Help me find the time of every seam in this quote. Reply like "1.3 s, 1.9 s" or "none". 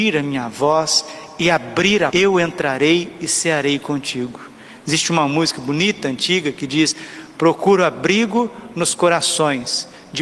2.1 s